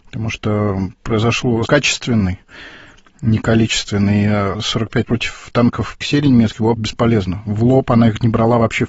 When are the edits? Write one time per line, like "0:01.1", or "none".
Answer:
0:01.7
0:04.5
0:05.0
0:06.0
0:06.8